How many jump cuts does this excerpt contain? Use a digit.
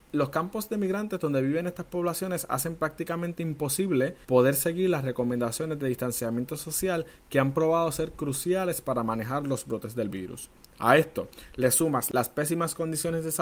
1